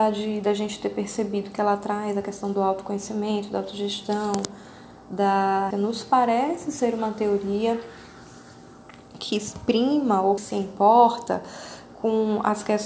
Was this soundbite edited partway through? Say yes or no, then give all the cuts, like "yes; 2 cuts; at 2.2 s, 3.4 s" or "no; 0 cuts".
yes; 2 cuts; at 5.7 s, 10.4 s